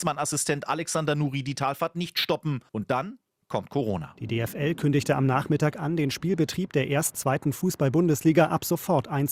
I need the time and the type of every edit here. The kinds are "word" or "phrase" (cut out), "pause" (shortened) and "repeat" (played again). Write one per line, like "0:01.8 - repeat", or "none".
0:02.7 - pause
0:07.1 - word